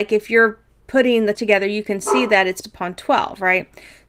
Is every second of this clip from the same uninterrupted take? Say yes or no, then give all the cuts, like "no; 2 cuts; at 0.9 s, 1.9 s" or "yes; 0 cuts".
no; 2 cuts; at 1.4 s, 2.6 s